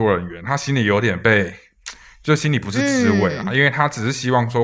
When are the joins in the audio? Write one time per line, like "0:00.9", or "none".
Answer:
none